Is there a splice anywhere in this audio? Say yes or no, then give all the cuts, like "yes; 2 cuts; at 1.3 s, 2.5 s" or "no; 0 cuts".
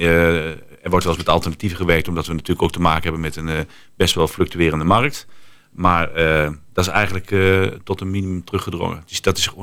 no; 0 cuts